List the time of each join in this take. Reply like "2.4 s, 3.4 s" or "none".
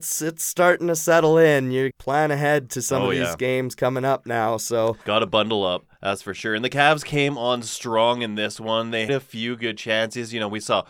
1.9 s, 5.0 s, 5.9 s, 9.1 s